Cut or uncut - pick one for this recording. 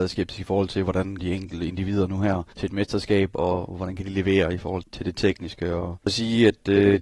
cut